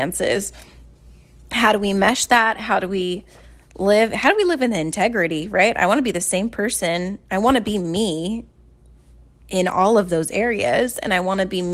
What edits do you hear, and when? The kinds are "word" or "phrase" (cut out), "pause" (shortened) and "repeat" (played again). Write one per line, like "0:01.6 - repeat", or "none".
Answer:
none